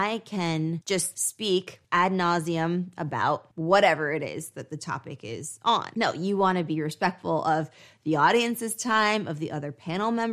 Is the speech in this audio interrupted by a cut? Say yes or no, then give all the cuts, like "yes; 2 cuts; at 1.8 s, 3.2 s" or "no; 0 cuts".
no; 0 cuts